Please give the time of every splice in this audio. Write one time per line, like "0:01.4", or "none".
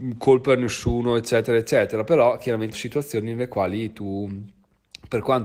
0:02.7